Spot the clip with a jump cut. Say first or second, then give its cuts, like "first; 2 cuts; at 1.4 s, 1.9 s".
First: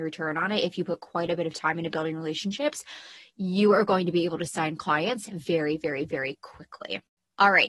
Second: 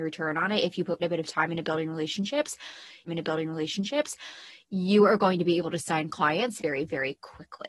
second; 3 cuts; at 1.0 s, 3.1 s, 6.6 s